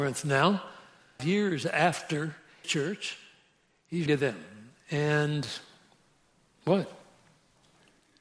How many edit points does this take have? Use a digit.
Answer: 3